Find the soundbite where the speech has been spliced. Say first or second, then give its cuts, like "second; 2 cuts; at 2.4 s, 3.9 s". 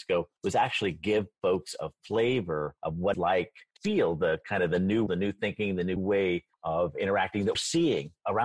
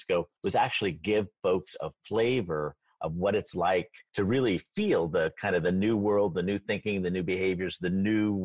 first; 7 cuts; at 2.8 s, 3.1 s, 3.8 s, 5.1 s, 6.0 s, 6.5 s, 7.5 s